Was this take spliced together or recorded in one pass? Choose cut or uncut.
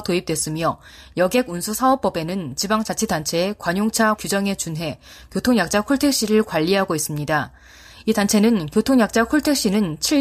cut